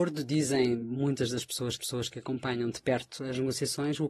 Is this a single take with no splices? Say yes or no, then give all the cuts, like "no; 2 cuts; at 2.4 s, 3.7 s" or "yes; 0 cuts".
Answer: no; 1 cut; at 1.8 s